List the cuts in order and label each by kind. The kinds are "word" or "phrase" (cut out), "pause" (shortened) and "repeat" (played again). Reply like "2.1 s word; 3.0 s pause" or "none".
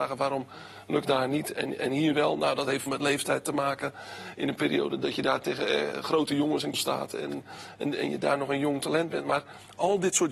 1.0 s word; 1.5 s word; 2.1 s word; 2.9 s word; 6.7 s word